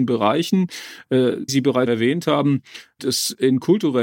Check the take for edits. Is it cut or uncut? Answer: cut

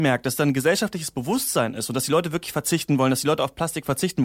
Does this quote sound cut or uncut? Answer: uncut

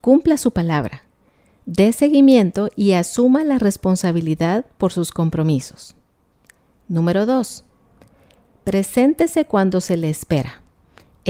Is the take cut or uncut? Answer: uncut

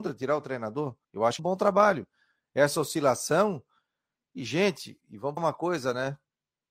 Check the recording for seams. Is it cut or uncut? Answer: cut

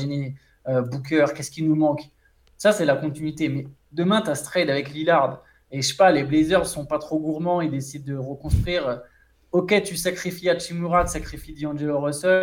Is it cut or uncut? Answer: cut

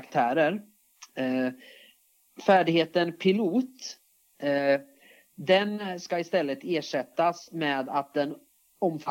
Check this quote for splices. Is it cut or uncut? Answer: uncut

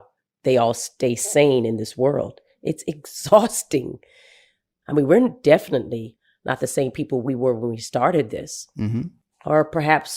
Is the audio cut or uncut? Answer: uncut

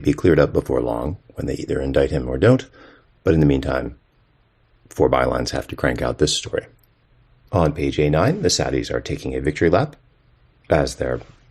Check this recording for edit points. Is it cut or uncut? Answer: uncut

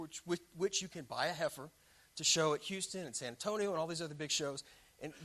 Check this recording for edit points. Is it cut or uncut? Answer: uncut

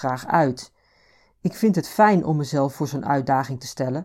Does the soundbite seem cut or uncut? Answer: uncut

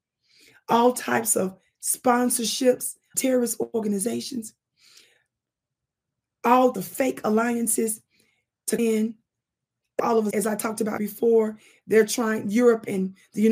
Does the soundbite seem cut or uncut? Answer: cut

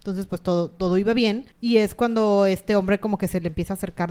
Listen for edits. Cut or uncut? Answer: cut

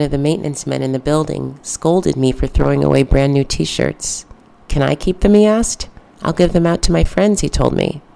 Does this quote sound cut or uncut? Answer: uncut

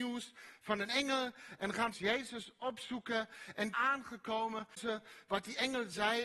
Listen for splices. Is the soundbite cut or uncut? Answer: cut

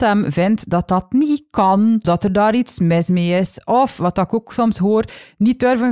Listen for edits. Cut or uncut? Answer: cut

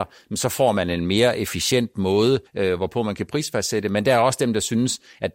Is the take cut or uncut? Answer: cut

